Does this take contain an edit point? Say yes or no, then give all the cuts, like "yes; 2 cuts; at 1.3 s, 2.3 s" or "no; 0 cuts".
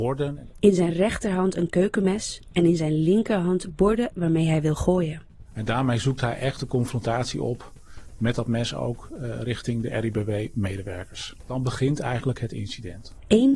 no; 0 cuts